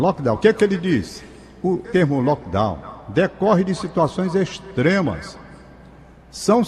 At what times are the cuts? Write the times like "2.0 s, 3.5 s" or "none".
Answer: 1.8 s